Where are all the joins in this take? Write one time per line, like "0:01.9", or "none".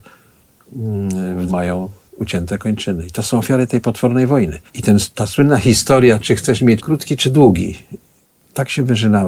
0:01.5
0:04.7
0:06.8